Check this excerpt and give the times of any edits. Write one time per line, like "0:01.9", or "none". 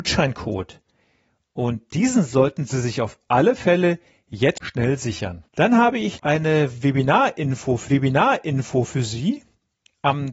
0:04.6
0:05.5
0:06.2
0:07.9